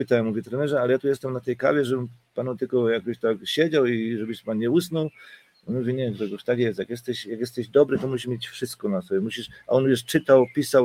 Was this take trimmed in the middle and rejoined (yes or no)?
no